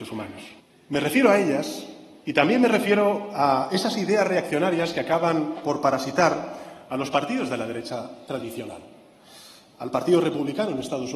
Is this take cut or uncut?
uncut